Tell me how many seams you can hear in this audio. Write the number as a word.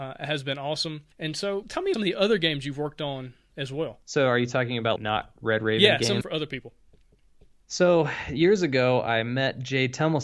six